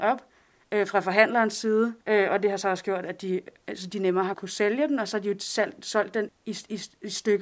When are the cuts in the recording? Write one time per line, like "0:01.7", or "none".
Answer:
0:02.0
0:04.3
0:06.3